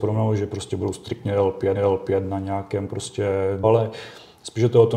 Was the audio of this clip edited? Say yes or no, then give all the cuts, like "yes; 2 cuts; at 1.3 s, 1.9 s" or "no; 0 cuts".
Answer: yes; 2 cuts; at 1.8 s, 3.6 s